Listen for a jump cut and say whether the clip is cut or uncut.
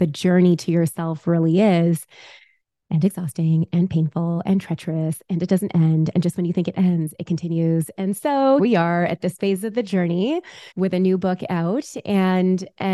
cut